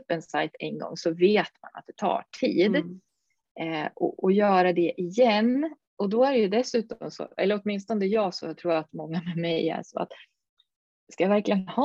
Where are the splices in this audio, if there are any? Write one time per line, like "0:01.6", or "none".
0:05.8